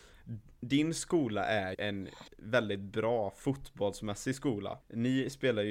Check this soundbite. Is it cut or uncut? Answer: cut